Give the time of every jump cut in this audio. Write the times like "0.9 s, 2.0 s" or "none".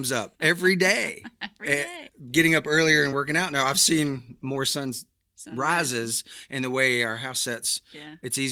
none